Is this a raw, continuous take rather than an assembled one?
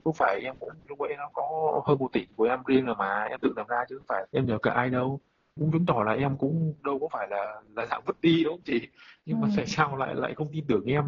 no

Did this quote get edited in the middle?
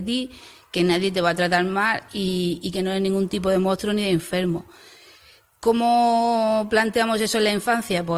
no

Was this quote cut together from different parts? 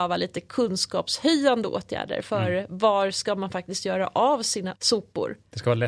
yes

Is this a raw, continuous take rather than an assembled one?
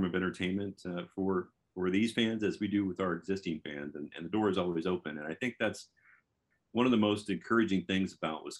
yes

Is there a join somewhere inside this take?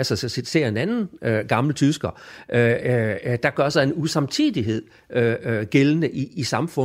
no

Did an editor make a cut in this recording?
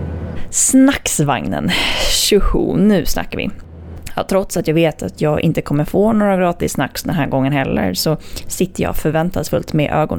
no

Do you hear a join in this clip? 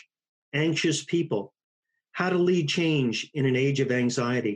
no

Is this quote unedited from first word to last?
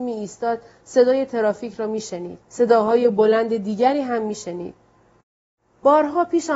no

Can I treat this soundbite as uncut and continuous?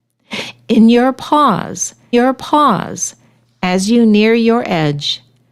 no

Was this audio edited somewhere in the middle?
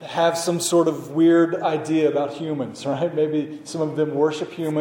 no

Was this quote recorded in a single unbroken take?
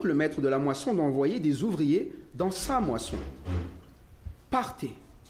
yes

